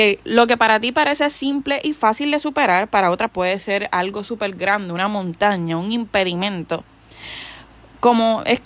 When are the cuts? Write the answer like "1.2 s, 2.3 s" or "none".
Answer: 3.3 s